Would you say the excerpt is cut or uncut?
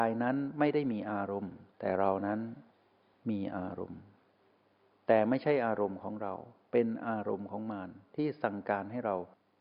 cut